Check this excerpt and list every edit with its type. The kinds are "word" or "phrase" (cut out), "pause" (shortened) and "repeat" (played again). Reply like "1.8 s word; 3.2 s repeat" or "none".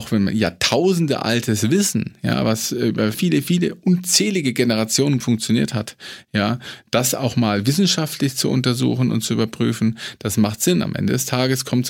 3.1 s word; 5.2 s word